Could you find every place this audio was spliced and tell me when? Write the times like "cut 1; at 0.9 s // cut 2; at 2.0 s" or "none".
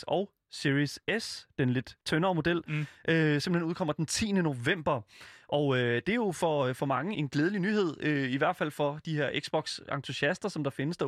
cut 1; at 2.0 s // cut 2; at 7.1 s